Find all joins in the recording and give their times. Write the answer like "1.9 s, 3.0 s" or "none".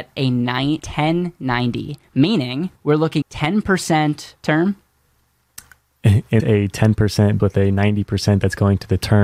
2.8 s, 3.2 s, 4.4 s, 6.4 s, 7.4 s